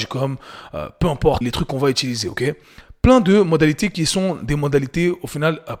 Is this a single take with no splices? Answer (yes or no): no